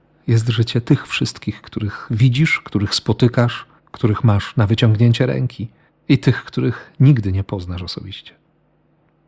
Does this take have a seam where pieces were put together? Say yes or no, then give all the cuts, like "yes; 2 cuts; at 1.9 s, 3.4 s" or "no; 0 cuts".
yes; 2 cuts; at 3.8 s, 5.9 s